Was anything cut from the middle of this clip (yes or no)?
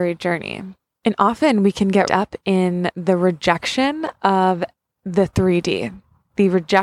yes